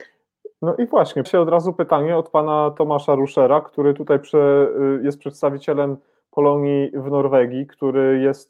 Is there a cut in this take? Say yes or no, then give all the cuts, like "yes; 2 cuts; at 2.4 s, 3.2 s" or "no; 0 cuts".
yes; 1 cut; at 1.3 s